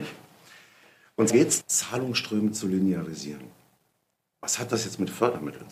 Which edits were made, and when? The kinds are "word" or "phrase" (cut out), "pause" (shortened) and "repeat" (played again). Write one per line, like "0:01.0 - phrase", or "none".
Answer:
0:01.3 - word
0:01.6 - word